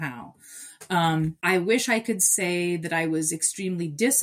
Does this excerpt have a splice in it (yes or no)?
no